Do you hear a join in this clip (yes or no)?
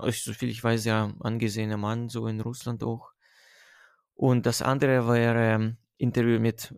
no